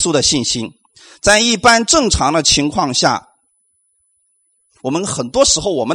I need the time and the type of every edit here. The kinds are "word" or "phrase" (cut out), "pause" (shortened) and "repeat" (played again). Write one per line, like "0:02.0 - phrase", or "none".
none